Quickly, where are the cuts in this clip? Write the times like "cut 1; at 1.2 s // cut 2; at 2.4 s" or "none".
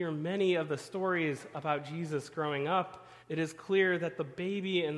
cut 1; at 3.2 s